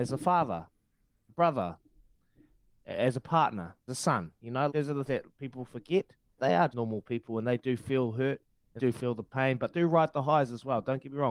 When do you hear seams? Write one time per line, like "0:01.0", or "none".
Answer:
0:01.3
0:03.9
0:04.7
0:05.1
0:06.4
0:06.7
0:08.8
0:09.7